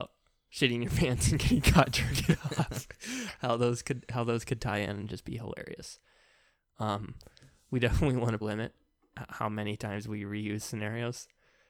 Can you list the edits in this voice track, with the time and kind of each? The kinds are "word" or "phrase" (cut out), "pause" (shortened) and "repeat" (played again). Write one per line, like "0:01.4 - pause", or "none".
0:08.4 - word